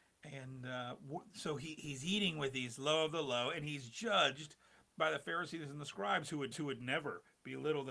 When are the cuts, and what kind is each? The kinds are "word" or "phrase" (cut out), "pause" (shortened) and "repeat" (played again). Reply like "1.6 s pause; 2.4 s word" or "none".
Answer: 6.5 s repeat